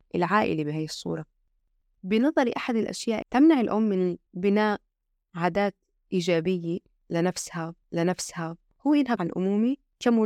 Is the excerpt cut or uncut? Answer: cut